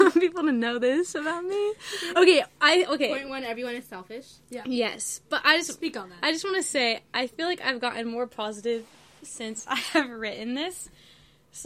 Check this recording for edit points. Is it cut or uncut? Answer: uncut